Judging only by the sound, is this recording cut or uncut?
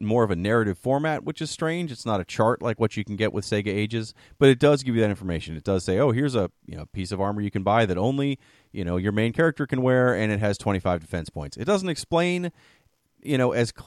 uncut